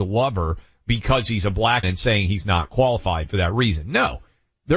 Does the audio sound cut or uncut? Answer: cut